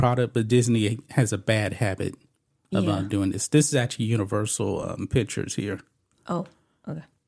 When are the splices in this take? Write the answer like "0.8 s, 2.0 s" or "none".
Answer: none